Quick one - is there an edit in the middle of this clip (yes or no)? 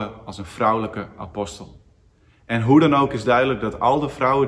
no